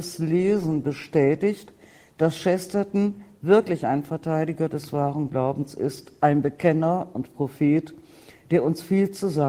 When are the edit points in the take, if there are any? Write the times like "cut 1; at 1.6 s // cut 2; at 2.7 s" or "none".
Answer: none